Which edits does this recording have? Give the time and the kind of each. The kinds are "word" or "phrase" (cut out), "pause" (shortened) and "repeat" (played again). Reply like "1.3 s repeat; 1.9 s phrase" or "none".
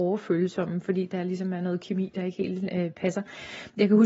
none